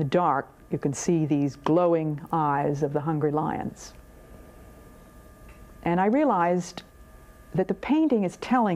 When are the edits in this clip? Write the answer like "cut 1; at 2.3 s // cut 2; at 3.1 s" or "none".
none